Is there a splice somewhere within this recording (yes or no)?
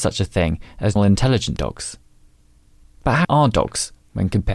yes